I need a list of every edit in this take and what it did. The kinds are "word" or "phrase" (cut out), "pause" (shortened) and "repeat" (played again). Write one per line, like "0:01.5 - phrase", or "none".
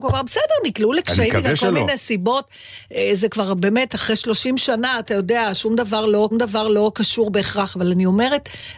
0:06.3 - repeat